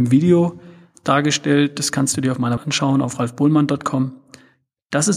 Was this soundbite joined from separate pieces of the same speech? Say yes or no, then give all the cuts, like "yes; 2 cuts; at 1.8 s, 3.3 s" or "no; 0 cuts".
yes; 1 cut; at 2.6 s